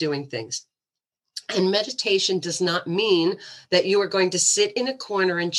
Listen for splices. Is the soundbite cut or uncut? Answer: uncut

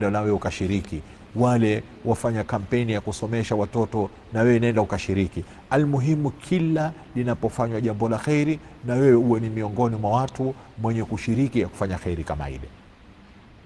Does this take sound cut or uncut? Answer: uncut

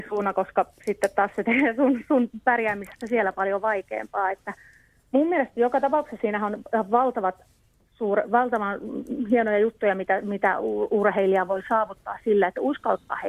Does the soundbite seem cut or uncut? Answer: uncut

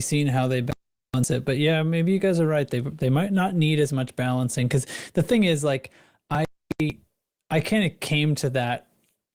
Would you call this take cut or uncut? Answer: uncut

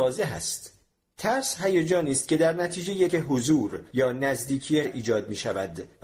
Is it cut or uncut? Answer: cut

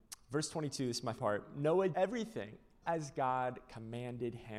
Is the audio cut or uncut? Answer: cut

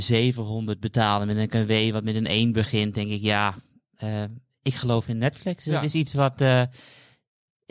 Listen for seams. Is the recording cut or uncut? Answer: uncut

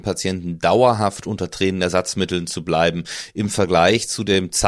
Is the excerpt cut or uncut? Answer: uncut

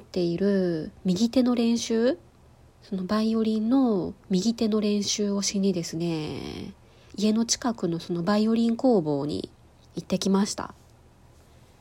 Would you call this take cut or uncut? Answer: cut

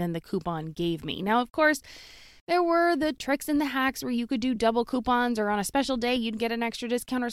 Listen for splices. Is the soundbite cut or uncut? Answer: uncut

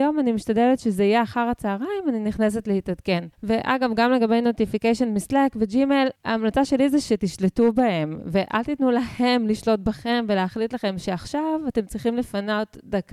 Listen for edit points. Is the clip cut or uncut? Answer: cut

